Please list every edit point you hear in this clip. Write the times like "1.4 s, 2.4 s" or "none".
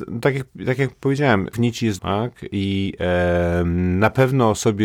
1.5 s, 2.0 s